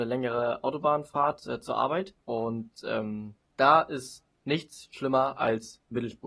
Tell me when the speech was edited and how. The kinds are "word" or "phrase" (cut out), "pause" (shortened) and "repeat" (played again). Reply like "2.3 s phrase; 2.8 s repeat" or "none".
2.2 s pause; 3.4 s pause